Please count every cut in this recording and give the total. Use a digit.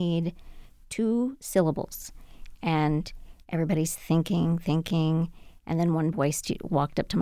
0